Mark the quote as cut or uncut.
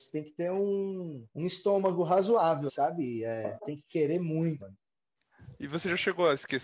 cut